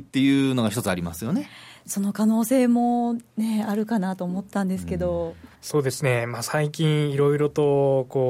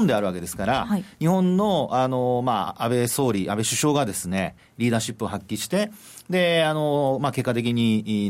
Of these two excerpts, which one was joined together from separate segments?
first; 1 cut; at 5.6 s

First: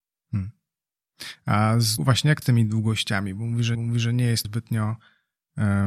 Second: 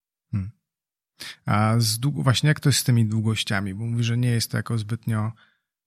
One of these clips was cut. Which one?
first; 4 cuts; at 2.0 s, 2.4 s, 3.7 s, 4.4 s

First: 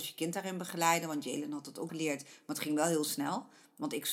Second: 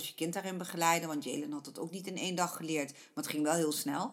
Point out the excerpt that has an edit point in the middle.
first; 1 cut; at 1.9 s

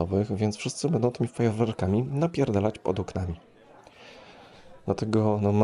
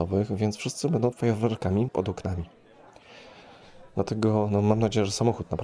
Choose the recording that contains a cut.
second; 2 cuts; at 1.1 s, 1.9 s

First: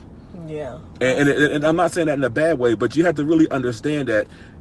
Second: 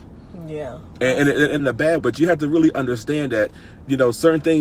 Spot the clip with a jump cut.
second; 2 cuts; at 1.6 s, 2.0 s

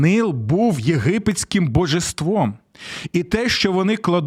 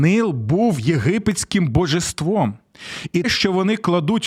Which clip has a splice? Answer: second; 1 cut; at 3.2 s

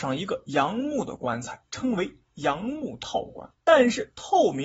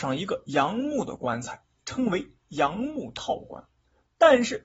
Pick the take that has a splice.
first; 2 cuts; at 1.7 s, 3.5 s

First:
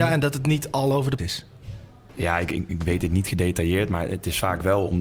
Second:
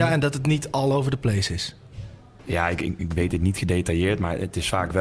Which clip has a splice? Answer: first; 1 cut; at 1.2 s

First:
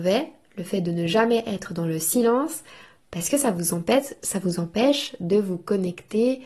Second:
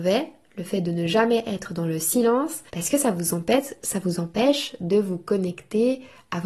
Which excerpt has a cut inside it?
second; 1 cut; at 2.7 s

